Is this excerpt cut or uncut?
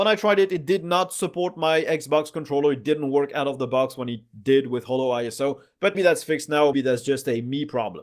cut